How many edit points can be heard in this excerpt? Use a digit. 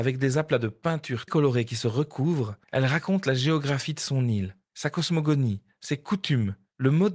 2